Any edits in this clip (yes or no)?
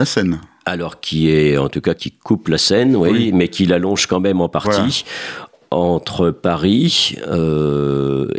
yes